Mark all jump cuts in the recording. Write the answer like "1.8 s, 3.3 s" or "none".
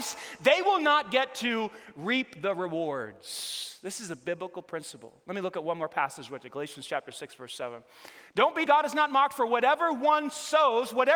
8.7 s